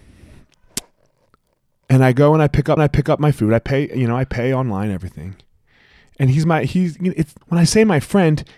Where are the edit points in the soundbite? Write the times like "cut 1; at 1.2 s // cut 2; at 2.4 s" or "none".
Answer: cut 1; at 2.8 s // cut 2; at 7.4 s